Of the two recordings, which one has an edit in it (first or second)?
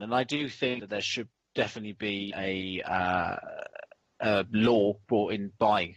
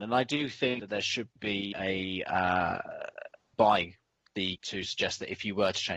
second